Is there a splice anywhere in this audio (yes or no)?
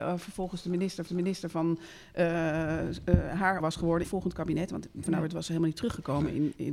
yes